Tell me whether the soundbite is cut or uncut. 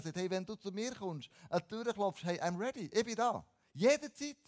uncut